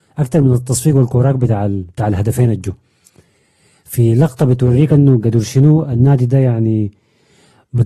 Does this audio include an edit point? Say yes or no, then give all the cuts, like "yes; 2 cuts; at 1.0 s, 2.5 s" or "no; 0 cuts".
no; 0 cuts